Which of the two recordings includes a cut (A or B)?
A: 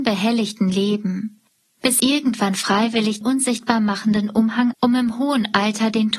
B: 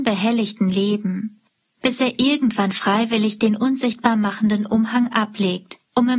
A